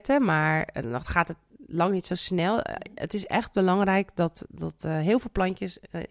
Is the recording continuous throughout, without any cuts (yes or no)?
yes